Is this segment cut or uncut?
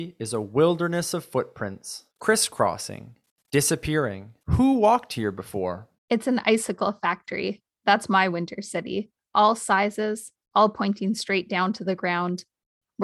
cut